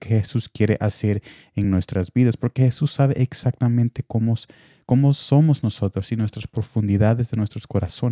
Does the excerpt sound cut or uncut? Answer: uncut